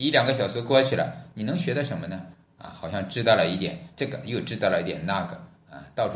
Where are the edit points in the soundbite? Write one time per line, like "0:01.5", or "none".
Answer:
0:03.9

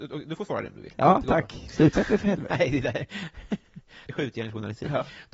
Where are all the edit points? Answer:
0:01.9
0:04.1

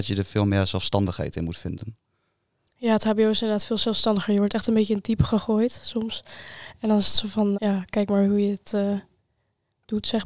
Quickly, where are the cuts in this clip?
0:07.5

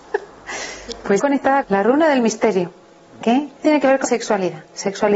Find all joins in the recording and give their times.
0:01.2
0:01.6
0:03.2
0:03.6
0:04.0

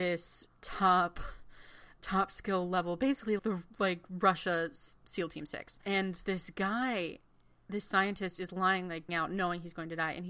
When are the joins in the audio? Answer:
0:02.0
0:03.4
0:09.1

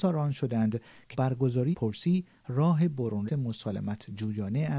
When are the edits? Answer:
0:01.1
0:01.7
0:03.3

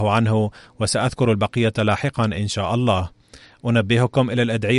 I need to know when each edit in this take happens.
none

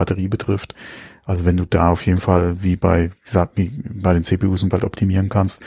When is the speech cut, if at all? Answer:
0:04.7

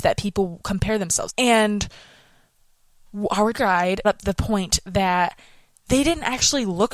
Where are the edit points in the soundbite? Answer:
0:01.3
0:03.5
0:04.0

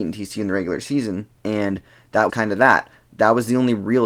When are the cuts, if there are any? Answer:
0:01.4
0:02.3

